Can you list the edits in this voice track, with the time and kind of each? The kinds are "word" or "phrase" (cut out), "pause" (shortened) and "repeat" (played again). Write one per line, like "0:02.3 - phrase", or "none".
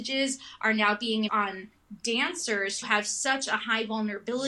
0:01.3 - word
0:02.8 - word